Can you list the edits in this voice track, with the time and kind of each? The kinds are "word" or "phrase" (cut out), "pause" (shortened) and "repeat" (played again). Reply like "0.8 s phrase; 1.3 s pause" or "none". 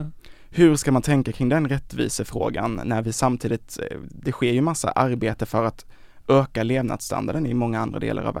none